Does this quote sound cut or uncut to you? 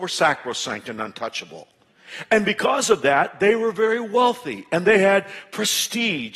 uncut